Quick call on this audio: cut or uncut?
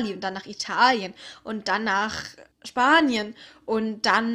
cut